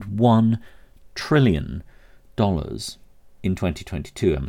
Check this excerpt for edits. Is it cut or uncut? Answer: uncut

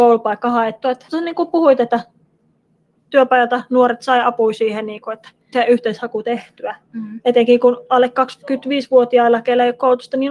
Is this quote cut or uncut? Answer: cut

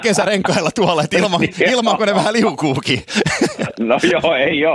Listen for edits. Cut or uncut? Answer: uncut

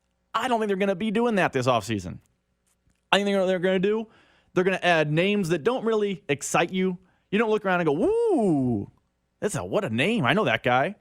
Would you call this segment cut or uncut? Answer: uncut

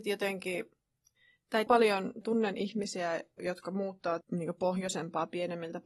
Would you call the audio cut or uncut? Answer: cut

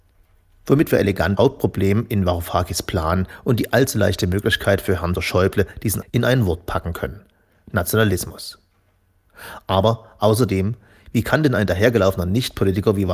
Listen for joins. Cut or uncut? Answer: cut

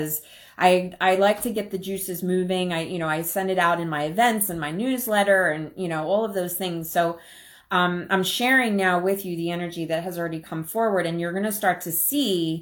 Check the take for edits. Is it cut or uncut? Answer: uncut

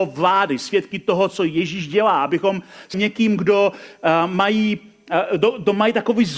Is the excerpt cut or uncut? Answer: cut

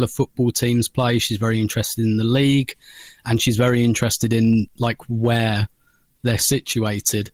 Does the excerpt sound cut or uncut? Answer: uncut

